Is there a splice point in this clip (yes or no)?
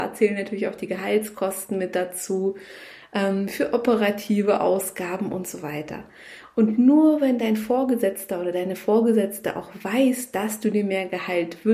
no